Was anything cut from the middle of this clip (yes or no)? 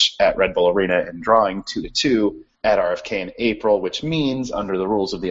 yes